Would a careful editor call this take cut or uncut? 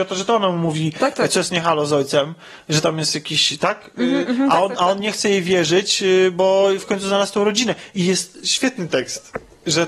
uncut